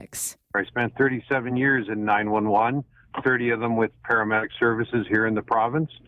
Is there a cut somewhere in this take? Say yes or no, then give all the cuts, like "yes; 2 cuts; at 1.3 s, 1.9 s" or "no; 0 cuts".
no; 0 cuts